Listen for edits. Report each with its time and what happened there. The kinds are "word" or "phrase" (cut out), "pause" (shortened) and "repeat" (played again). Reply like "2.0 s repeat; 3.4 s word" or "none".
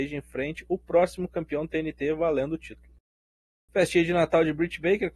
none